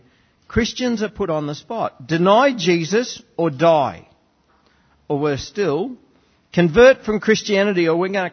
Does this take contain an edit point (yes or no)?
no